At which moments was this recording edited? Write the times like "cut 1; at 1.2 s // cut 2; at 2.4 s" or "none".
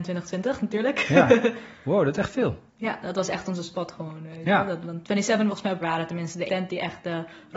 cut 1; at 2.7 s // cut 2; at 5.5 s // cut 3; at 5.8 s // cut 4; at 6.5 s